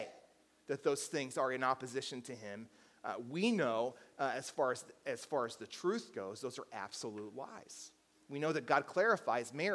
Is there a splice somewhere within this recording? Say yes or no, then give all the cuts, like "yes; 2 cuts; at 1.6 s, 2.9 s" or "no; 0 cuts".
no; 0 cuts